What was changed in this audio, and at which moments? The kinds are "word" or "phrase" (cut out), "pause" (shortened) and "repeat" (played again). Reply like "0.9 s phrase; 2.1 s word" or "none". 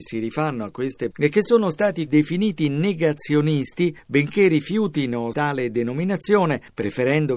1.1 s word; 2.1 s word; 5.3 s word